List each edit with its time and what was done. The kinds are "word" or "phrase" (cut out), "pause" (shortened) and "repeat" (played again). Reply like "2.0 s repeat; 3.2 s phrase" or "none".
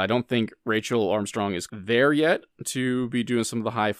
1.7 s word

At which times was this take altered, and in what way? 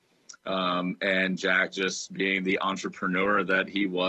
none

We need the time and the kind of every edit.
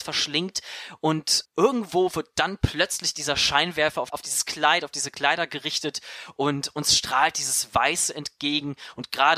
1.5 s word; 4.1 s word

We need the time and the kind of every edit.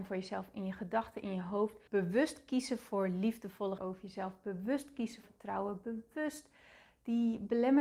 1.9 s pause; 3.8 s word; 5.2 s word

